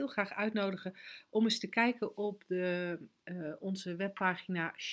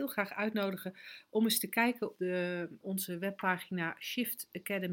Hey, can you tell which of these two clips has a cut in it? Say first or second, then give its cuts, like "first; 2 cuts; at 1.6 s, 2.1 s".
second; 2 cuts; at 2.2 s, 2.8 s